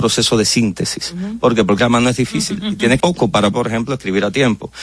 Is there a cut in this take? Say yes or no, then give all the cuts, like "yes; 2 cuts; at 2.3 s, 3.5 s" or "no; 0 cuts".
yes; 3 cuts; at 1.8 s, 3.0 s, 3.5 s